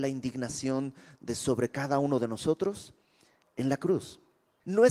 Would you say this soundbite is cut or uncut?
uncut